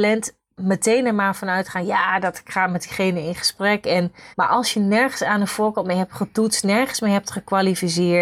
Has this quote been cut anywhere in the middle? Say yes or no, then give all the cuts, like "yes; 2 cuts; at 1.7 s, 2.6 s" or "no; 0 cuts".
yes; 1 cut; at 4.3 s